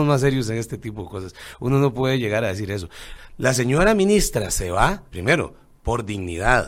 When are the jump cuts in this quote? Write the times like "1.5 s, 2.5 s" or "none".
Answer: 5.1 s